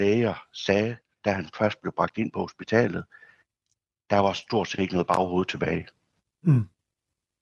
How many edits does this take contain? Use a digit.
0